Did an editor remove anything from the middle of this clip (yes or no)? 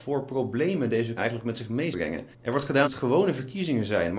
yes